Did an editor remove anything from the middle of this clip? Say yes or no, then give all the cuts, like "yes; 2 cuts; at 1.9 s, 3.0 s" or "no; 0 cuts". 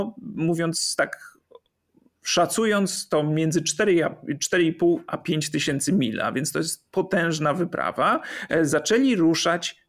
no; 0 cuts